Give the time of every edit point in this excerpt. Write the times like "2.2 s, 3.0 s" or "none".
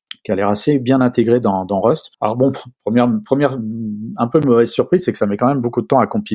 2.1 s